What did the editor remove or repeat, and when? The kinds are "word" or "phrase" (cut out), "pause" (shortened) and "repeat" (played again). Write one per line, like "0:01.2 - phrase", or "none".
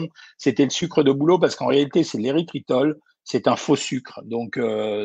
none

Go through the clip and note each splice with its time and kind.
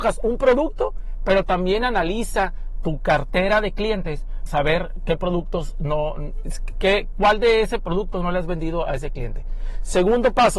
0:04.5 - word

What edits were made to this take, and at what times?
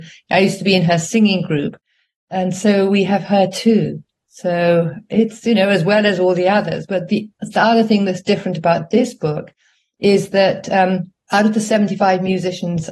none

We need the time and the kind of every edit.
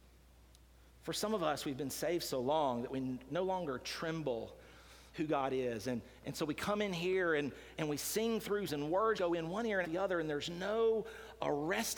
0:03.3 - word
0:05.1 - word
0:07.8 - word
0:08.7 - word
0:09.2 - word
0:09.8 - word

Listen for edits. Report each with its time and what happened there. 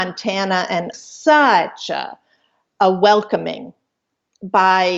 0:00.9 - phrase

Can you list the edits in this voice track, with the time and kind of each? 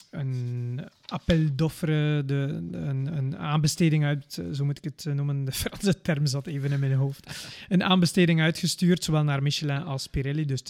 none

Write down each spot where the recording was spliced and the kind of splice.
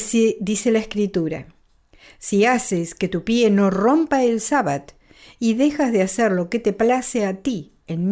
none

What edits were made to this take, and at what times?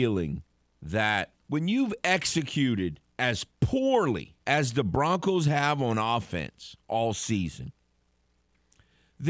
0:01.4 - pause
0:04.4 - pause

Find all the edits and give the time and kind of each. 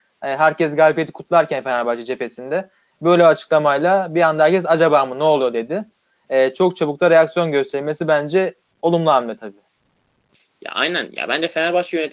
none

